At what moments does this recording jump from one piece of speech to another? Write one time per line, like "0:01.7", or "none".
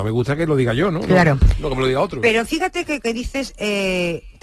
none